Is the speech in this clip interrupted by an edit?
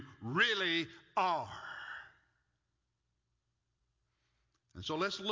no; 0 cuts

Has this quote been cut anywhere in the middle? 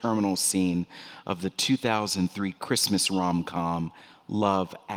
no; 0 cuts

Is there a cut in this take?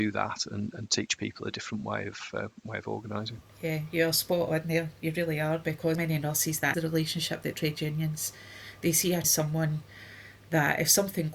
yes; 5 cuts; at 3.5 s, 5.9 s, 6.7 s, 7.5 s, 9.2 s

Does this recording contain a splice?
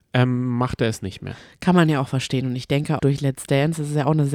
yes; 1 cut; at 3.0 s

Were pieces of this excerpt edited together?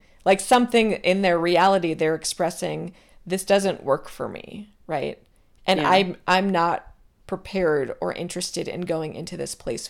no; 0 cuts

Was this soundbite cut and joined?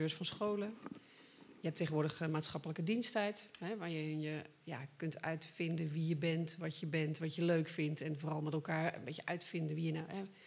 no; 0 cuts

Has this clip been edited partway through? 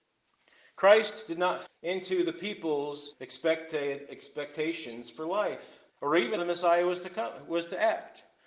yes; 4 cuts; at 1.7 s, 3.1 s, 5.9 s, 6.4 s

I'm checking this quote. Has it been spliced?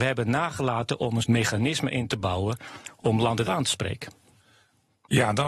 yes; 2 cuts; at 1.2 s, 3.4 s

